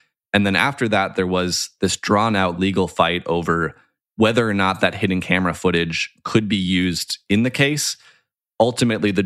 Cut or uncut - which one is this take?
uncut